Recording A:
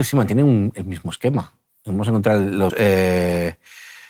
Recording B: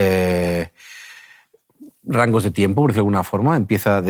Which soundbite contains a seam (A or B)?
A